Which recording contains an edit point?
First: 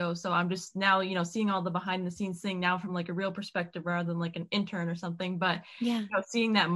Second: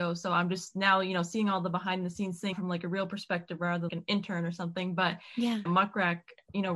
second; 3 cuts; at 2.5 s, 3.9 s, 5.7 s

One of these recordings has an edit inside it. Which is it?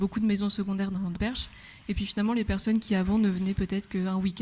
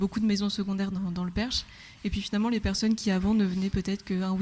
first; 1 cut; at 1.2 s

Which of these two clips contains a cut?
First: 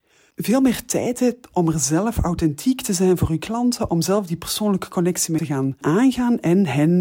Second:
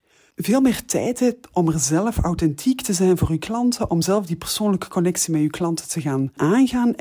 first; 1 cut; at 5.4 s

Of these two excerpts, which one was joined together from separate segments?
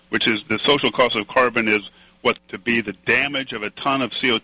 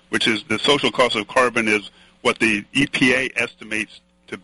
first; 1 cut; at 2.4 s

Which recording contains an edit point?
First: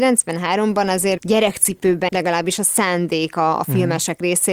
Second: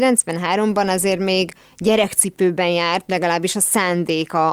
first; 2 cuts; at 1.2 s, 2.1 s

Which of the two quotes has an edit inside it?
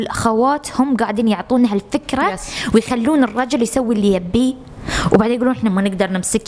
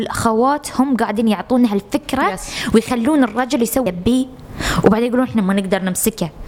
second; 1 cut; at 3.9 s

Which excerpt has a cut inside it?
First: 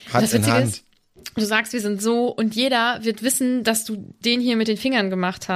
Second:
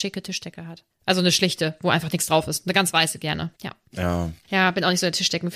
second; 1 cut; at 3.5 s

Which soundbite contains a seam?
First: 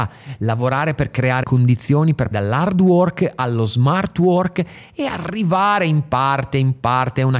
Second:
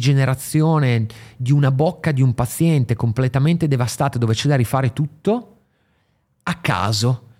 first; 2 cuts; at 1.4 s, 2.3 s

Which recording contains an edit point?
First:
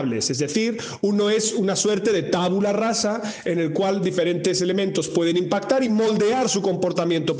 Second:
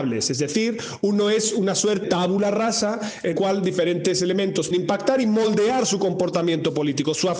second; 3 cuts; at 2.0 s, 3.3 s, 4.7 s

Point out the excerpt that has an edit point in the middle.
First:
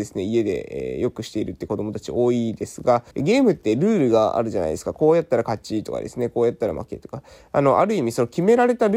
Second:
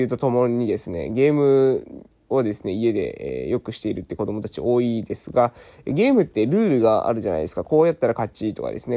first; 1 cut; at 3.1 s

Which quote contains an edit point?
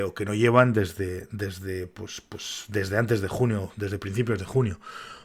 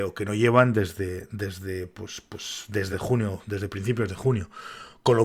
second; 1 cut; at 2.9 s

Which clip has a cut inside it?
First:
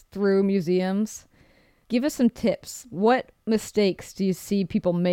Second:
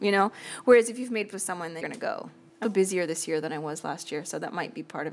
second; 3 cuts; at 1.3 s, 1.8 s, 2.6 s

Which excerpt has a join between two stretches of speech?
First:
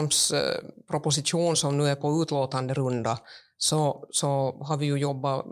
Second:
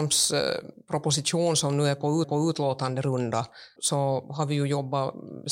second; 2 cuts; at 2.2 s, 3.8 s

